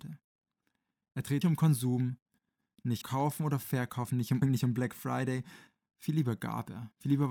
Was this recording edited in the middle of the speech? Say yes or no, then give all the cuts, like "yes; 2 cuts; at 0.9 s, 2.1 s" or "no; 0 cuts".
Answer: yes; 3 cuts; at 1.4 s, 3.0 s, 4.4 s